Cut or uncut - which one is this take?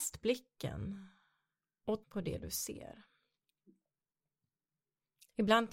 cut